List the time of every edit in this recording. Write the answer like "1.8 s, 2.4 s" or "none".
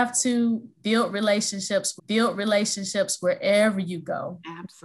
2.0 s